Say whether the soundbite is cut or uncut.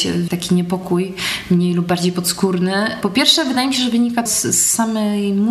cut